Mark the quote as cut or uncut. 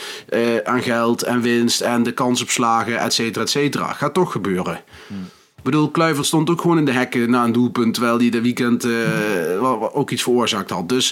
uncut